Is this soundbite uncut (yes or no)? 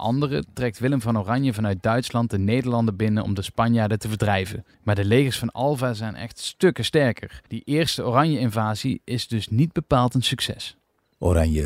no